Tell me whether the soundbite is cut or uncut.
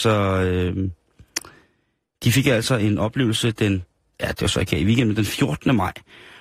uncut